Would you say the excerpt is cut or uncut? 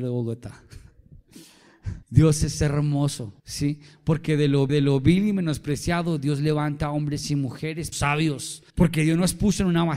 cut